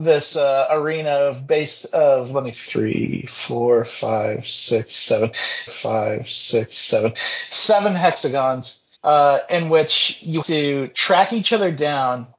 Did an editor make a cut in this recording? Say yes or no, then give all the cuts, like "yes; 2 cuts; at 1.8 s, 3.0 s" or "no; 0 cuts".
yes; 4 cuts; at 2.5 s, 5.7 s, 8.9 s, 10.4 s